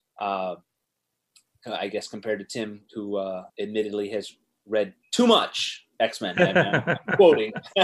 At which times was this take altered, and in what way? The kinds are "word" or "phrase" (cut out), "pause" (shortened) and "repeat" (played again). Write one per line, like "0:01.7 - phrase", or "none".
0:03.5 - pause